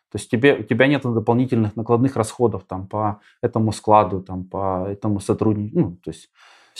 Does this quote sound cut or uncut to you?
uncut